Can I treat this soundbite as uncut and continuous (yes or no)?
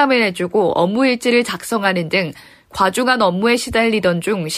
yes